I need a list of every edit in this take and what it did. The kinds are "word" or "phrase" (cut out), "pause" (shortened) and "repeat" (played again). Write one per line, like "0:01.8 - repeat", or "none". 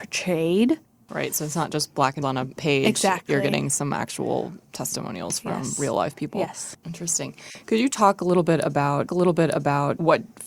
0:02.2 - phrase
0:06.8 - pause
0:09.1 - repeat